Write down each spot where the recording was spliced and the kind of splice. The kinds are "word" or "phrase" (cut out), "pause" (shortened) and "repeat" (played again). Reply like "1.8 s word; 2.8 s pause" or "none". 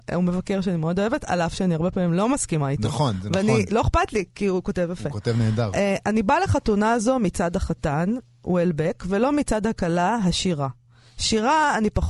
none